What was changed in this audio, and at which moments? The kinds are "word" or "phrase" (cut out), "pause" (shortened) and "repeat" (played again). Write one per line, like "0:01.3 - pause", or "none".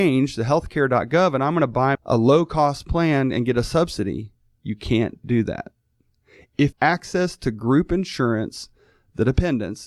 0:01.9 - phrase
0:06.7 - phrase